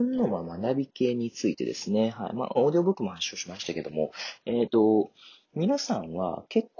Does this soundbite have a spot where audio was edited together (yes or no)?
yes